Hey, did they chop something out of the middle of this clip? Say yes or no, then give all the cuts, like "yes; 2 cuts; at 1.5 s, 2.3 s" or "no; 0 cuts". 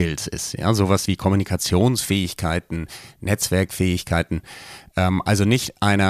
yes; 1 cut; at 1.1 s